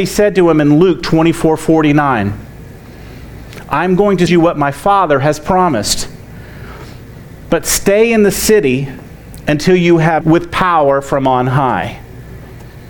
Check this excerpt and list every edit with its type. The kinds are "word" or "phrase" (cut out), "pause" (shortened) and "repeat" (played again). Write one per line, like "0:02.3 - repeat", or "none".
0:04.3 - word
0:10.2 - phrase